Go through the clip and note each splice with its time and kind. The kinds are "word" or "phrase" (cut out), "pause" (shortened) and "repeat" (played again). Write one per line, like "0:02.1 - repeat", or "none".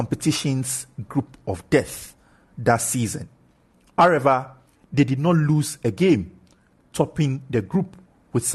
none